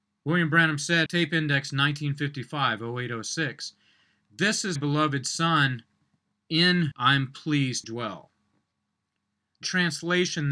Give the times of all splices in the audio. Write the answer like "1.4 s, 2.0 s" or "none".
1.1 s, 4.8 s, 6.9 s, 7.8 s, 9.6 s